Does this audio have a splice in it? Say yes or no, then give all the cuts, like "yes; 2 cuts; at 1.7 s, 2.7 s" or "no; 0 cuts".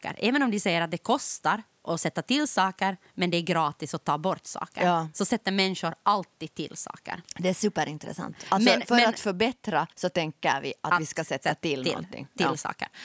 yes; 1 cut; at 9.9 s